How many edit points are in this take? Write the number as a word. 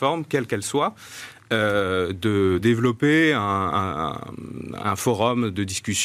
two